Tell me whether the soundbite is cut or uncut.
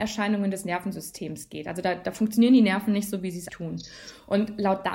cut